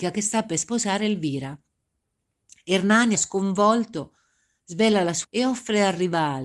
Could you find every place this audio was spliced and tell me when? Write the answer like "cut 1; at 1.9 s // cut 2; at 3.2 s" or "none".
cut 1; at 3.1 s // cut 2; at 5.2 s